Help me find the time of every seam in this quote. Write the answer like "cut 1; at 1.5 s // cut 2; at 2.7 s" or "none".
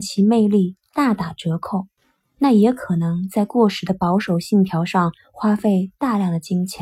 cut 1; at 2.0 s